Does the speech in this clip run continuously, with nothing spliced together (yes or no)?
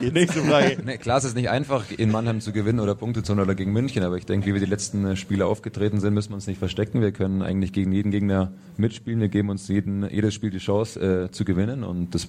yes